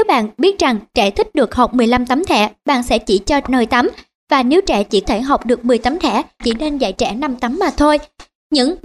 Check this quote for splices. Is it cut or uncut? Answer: cut